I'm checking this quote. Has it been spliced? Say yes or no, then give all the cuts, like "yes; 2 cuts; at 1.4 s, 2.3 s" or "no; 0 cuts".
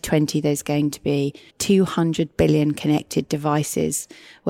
yes; 1 cut; at 1.5 s